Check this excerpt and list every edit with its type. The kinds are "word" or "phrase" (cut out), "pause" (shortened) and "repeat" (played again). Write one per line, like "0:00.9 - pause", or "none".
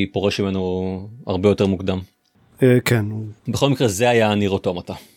0:03.4 - pause